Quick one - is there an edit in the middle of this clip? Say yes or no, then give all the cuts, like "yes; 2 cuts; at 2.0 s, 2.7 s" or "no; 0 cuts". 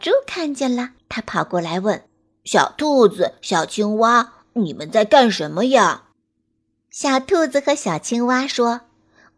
yes; 3 cuts; at 1.0 s, 2.1 s, 6.1 s